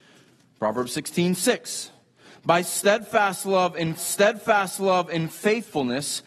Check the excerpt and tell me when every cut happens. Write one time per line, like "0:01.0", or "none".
0:04.0